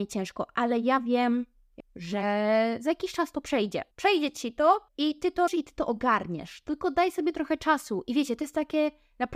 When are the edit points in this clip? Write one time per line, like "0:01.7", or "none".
0:01.8
0:03.9
0:04.9
0:05.5